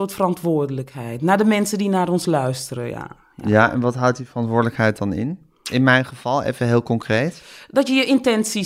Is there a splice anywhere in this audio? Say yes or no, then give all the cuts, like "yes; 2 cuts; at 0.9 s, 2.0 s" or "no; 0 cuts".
no; 0 cuts